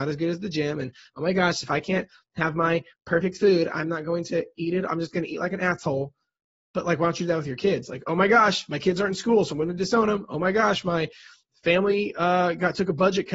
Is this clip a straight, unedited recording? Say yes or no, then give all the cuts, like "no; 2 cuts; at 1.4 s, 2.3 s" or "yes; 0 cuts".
yes; 0 cuts